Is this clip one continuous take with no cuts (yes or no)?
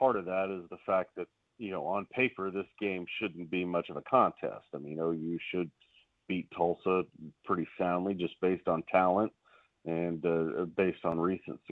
yes